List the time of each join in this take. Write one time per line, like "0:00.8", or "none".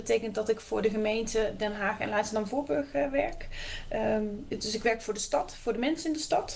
none